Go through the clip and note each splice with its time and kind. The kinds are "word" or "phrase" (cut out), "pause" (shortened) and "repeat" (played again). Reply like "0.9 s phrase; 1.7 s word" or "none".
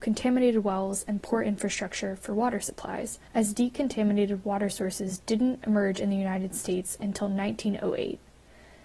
3.3 s pause